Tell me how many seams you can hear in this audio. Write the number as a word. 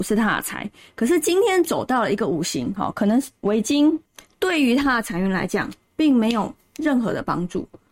zero